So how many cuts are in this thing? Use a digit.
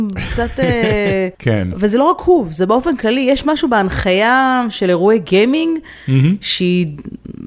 1